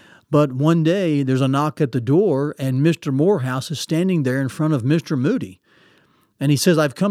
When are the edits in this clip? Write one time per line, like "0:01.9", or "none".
none